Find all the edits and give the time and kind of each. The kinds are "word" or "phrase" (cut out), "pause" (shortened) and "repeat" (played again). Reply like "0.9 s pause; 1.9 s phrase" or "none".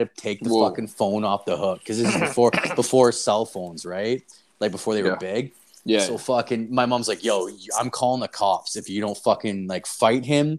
none